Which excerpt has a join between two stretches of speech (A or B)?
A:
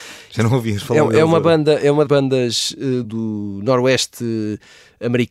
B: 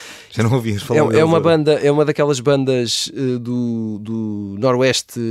A